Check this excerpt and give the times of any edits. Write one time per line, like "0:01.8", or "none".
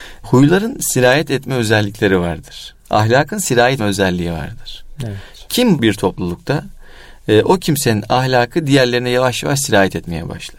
0:03.8
0:05.8

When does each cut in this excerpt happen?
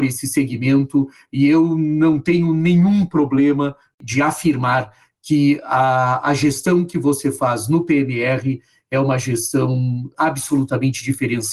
none

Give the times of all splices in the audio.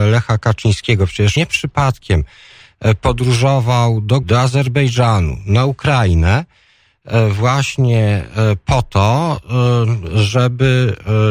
0:01.4
0:04.2

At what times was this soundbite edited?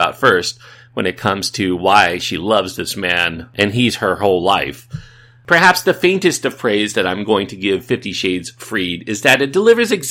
none

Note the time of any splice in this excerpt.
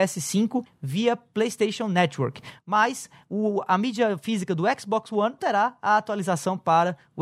0:05.4

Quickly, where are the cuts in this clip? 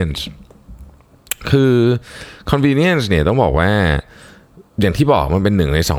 none

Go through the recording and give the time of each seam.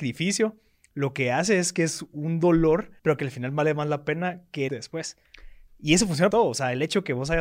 0:03.0
0:04.7
0:06.3

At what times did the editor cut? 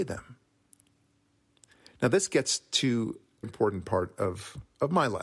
0:03.4

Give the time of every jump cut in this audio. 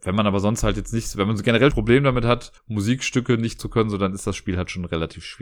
0:01.7
0:02.6
0:03.6

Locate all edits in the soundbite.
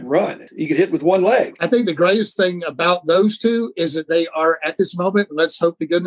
none

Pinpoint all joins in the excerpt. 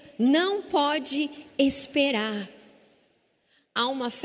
none

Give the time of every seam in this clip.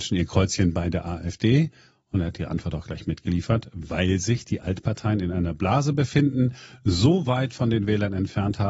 none

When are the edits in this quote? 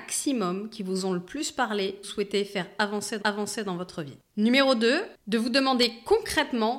0:02.0
0:03.2
0:04.3
0:05.2

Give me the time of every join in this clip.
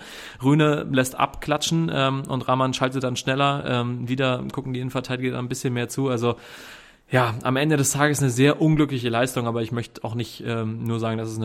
none

